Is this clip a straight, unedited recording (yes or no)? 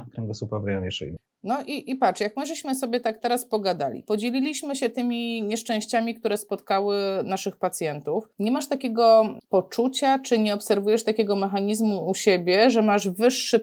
no